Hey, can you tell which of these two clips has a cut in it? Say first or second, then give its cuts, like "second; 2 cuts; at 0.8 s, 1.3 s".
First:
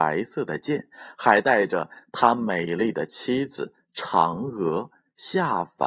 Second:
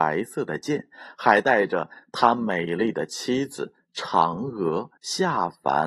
second; 1 cut; at 5.0 s